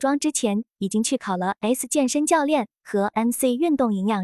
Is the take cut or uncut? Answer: cut